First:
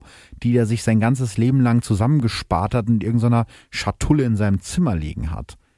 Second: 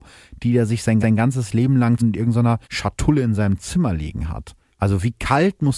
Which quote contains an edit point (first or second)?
second